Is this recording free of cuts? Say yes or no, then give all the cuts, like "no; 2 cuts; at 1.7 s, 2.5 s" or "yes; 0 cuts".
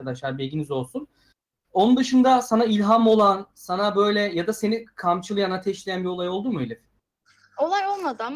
yes; 0 cuts